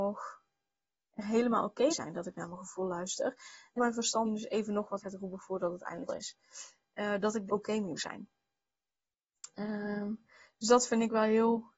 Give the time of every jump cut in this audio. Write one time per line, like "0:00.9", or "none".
0:01.9
0:03.8
0:04.2
0:05.0
0:06.1
0:07.5
0:08.0